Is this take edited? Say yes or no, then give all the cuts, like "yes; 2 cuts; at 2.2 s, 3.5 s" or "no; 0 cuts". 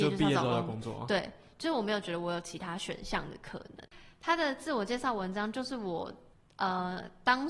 yes; 1 cut; at 6.3 s